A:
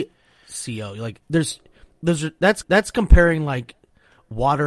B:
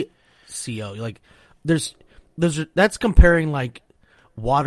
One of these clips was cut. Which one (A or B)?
A